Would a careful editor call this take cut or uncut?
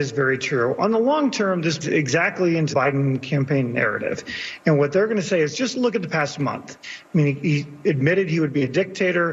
cut